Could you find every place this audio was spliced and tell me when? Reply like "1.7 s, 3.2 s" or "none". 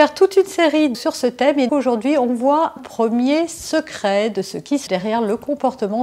0.9 s, 1.7 s, 2.8 s, 4.9 s